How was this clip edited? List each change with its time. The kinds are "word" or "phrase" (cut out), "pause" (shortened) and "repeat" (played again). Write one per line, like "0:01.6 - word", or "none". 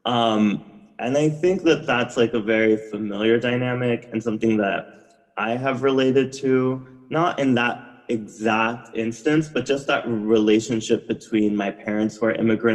none